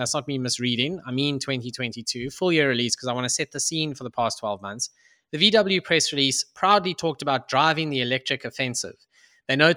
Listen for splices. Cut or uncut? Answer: uncut